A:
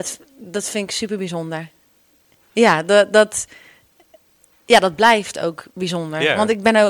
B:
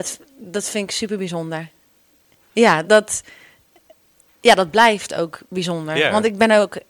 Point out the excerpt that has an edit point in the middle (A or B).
B